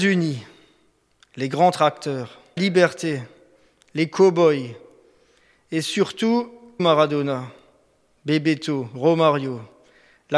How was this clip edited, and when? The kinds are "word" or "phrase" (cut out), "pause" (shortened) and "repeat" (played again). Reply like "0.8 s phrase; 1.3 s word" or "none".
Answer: 2.6 s word; 6.8 s word